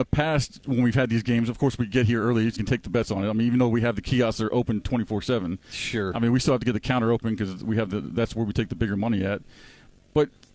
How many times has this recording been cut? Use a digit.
1